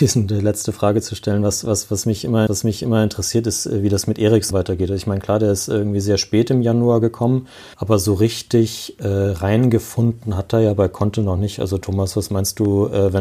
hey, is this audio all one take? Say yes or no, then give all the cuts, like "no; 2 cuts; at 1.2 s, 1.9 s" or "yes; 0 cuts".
no; 3 cuts; at 2.5 s, 4.5 s, 7.7 s